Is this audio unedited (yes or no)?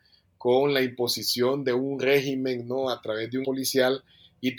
no